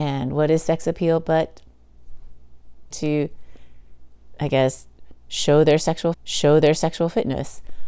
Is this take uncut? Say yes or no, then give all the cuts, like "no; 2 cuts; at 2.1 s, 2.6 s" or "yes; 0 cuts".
no; 2 cuts; at 2.9 s, 6.1 s